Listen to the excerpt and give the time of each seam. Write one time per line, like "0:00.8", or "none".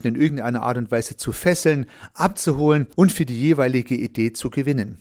0:02.9